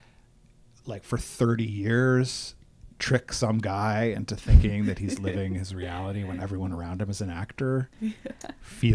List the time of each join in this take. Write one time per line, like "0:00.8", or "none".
0:06.4
0:07.9